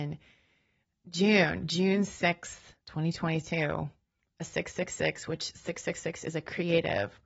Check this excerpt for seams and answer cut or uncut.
cut